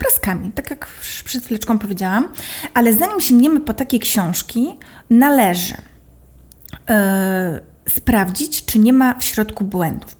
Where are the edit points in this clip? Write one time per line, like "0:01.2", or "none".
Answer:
none